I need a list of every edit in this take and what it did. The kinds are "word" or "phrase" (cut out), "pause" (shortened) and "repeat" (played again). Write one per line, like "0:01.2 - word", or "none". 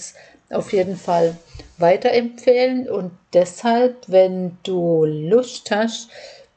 none